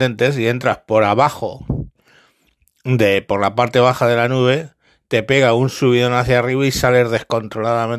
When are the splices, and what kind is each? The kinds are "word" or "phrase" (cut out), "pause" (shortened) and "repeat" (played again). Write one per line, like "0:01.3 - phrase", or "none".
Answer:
none